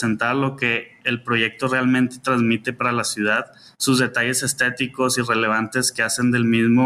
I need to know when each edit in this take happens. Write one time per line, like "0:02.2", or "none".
0:03.7